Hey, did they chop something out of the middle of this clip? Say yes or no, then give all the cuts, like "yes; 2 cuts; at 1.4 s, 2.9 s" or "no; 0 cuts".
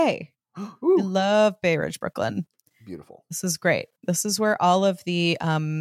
no; 0 cuts